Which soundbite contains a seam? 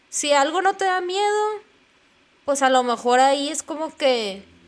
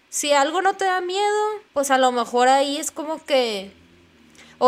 second; 1 cut; at 1.7 s

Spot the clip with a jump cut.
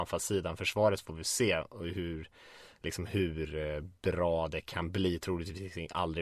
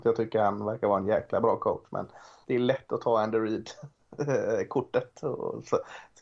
second; 1 cut; at 2.4 s

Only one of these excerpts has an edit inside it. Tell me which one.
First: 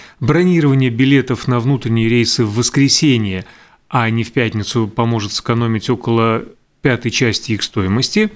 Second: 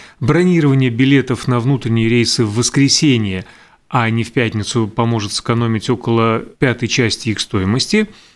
second; 1 cut; at 6.5 s

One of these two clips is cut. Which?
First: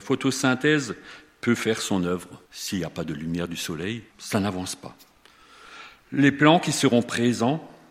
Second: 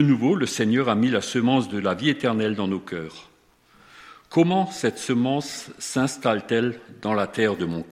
first; 2 cuts; at 2.4 s, 4.1 s

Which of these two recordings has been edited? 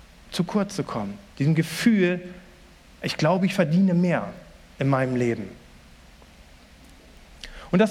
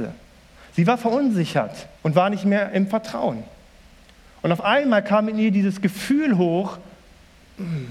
second; 1 cut; at 2.0 s

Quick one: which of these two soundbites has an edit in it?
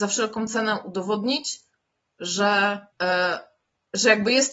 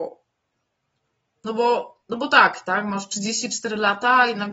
first; 1 cut; at 2.9 s

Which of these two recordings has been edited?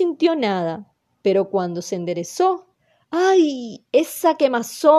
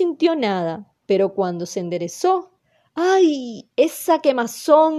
second; 1 cut; at 1.0 s

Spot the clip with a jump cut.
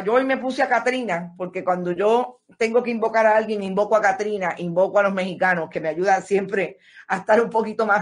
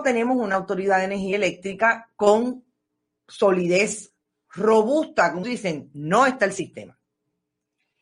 second; 1 cut; at 5.4 s

